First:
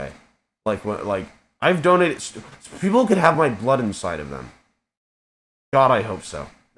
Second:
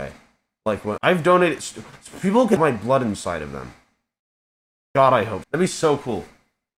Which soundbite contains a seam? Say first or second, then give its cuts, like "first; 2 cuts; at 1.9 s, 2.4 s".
second; 3 cuts; at 1.0 s, 2.6 s, 5.4 s